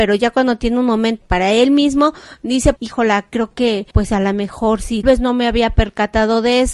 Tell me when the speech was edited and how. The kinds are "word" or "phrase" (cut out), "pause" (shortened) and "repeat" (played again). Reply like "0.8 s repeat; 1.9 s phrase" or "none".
1.2 s word; 2.8 s word; 3.9 s pause; 5.0 s word